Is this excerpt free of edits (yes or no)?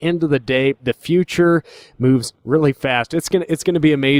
yes